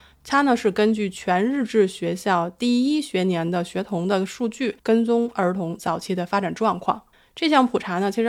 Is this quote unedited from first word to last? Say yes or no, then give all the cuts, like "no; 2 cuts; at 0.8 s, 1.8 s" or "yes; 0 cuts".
no; 2 cuts; at 4.8 s, 7.1 s